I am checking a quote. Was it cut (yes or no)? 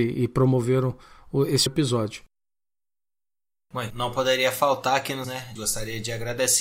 yes